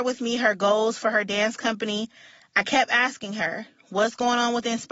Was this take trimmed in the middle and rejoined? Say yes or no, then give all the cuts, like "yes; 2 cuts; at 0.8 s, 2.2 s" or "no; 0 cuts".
no; 0 cuts